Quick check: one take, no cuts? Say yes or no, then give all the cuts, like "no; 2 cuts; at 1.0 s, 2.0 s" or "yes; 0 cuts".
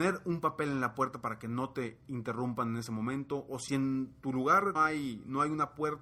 no; 2 cuts; at 3.7 s, 4.8 s